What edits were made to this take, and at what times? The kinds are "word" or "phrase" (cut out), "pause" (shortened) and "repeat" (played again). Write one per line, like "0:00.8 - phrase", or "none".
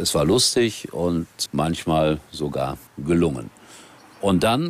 0:01.5 - word
0:02.9 - pause